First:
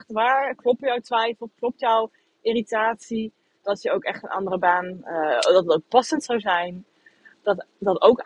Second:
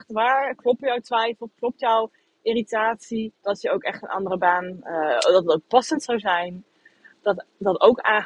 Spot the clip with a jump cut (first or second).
second